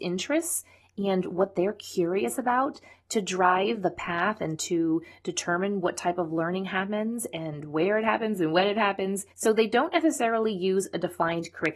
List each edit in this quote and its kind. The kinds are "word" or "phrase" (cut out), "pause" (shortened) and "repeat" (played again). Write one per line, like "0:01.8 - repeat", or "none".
0:09.3 - pause